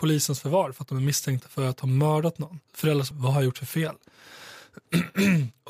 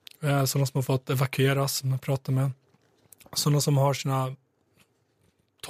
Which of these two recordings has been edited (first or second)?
first